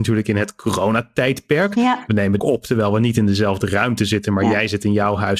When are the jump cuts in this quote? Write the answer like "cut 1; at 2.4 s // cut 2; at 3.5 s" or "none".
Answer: cut 1; at 2.4 s